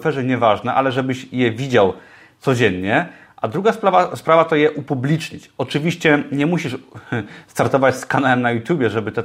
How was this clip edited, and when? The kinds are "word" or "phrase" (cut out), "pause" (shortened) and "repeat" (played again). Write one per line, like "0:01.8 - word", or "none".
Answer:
none